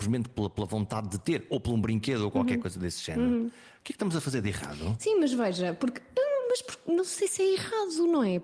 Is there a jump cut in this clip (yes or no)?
no